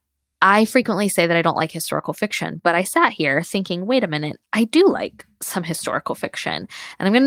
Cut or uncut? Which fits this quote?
uncut